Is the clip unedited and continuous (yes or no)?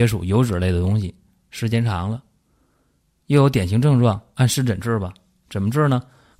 yes